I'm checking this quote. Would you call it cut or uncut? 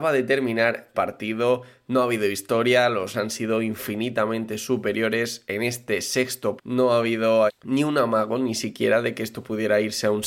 cut